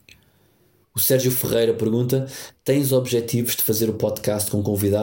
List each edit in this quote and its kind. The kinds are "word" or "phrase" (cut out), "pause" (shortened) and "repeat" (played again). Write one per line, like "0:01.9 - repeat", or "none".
none